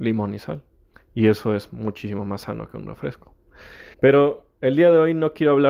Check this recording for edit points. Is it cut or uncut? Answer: cut